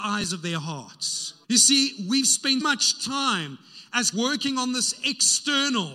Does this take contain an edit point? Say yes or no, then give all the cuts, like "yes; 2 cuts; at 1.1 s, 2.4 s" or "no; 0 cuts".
yes; 3 cuts; at 1.4 s, 2.6 s, 4.1 s